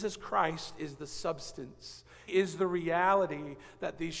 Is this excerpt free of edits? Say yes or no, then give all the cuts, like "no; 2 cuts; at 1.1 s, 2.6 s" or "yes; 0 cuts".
no; 1 cut; at 2.3 s